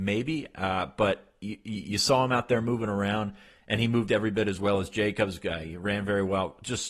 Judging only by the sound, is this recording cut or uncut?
uncut